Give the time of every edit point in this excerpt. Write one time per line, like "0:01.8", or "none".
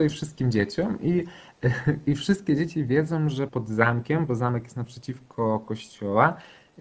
0:03.5